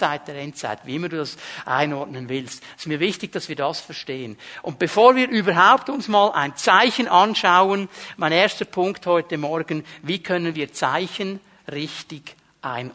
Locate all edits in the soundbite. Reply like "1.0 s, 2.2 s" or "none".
none